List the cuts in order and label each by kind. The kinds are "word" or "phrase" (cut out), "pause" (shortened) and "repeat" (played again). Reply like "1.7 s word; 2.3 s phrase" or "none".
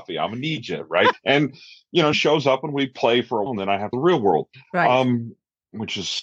1.1 s word; 2.1 s word; 3.5 s word; 3.9 s phrase